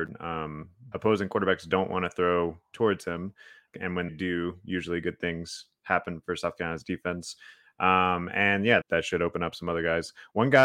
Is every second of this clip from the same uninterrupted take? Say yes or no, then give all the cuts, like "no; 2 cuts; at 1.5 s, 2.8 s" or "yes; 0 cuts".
no; 4 cuts; at 0.9 s, 3.7 s, 4.1 s, 8.8 s